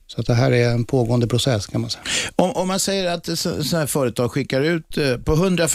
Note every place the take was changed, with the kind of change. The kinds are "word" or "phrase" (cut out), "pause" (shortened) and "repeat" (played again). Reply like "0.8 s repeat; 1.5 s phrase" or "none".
none